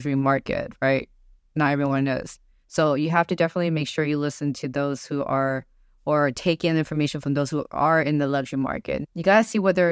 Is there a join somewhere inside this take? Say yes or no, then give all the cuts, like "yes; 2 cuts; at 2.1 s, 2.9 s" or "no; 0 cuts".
no; 0 cuts